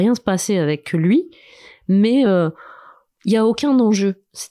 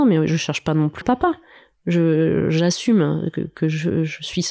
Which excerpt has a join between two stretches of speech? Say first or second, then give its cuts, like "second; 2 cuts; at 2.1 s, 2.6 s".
second; 1 cut; at 1.0 s